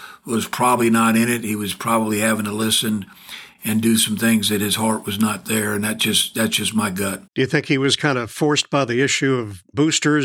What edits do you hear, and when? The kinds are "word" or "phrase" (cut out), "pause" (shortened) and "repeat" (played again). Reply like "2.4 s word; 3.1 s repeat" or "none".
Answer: 7.3 s pause